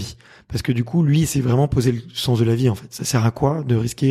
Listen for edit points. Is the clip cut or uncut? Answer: uncut